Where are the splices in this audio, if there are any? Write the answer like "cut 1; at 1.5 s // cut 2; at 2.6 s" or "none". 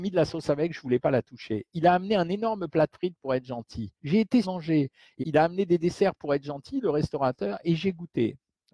cut 1; at 4.0 s // cut 2; at 4.4 s // cut 3; at 5.2 s